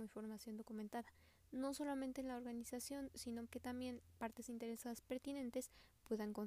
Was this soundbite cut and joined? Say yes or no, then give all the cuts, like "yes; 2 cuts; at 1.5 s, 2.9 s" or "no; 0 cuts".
yes; 1 cut; at 3.5 s